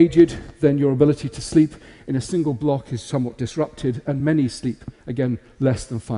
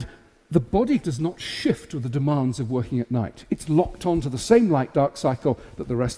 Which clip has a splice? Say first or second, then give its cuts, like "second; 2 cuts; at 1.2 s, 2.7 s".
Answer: second; 1 cut; at 1.0 s